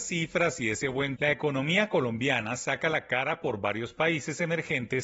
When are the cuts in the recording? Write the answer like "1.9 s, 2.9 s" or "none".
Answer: 1.2 s